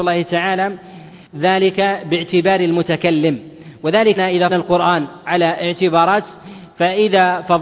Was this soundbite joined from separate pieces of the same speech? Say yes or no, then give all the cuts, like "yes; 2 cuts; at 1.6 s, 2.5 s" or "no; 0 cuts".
yes; 3 cuts; at 1.3 s, 4.2 s, 4.5 s